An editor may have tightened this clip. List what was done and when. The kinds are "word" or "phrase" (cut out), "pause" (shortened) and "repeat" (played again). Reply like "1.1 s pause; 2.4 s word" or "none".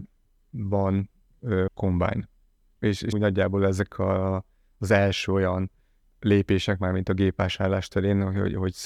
1.7 s word; 3.1 s word